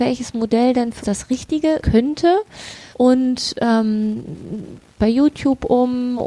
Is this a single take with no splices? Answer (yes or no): no